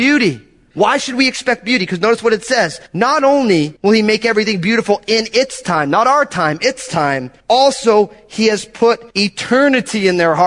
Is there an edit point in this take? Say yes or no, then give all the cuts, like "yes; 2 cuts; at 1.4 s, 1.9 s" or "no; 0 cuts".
yes; 4 cuts; at 2.9 s, 3.8 s, 7.4 s, 9.1 s